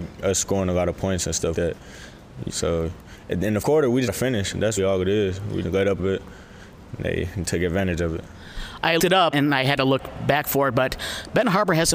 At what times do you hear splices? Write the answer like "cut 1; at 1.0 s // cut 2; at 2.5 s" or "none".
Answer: cut 1; at 1.5 s // cut 2; at 2.5 s // cut 3; at 3.6 s // cut 4; at 4.1 s // cut 5; at 4.8 s // cut 6; at 5.6 s // cut 7; at 6.0 s // cut 8; at 9.0 s // cut 9; at 9.3 s